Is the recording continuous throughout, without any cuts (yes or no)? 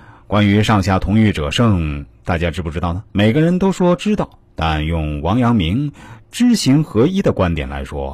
no